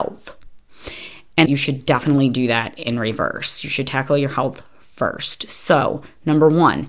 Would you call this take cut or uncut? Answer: cut